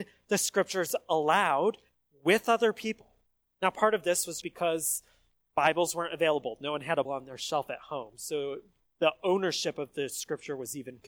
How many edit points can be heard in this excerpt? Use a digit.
2